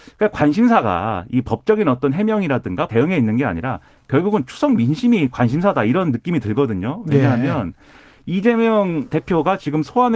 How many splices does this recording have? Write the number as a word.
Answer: one